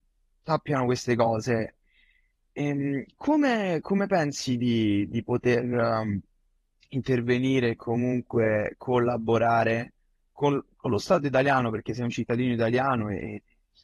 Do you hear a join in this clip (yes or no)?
no